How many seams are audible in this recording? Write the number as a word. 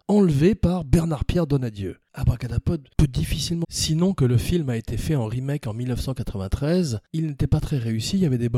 one